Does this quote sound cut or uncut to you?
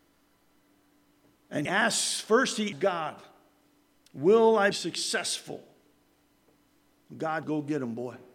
cut